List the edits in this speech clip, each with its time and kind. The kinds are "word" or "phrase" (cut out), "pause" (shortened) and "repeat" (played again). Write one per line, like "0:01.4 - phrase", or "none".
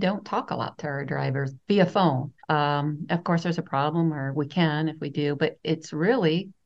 0:02.4 - pause